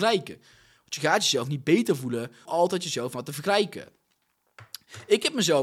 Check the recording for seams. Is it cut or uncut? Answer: cut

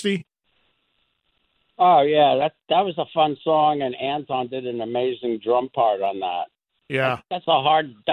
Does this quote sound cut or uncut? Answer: uncut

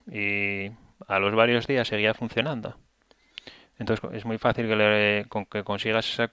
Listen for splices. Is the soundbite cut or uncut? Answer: uncut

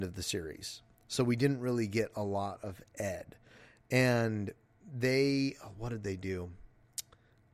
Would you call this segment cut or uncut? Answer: uncut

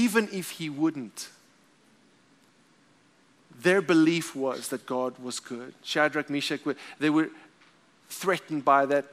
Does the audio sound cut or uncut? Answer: uncut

